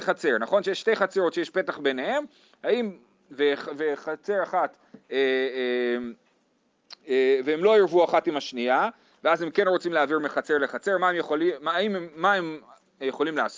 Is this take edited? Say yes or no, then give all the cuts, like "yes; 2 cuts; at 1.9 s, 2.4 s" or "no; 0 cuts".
no; 0 cuts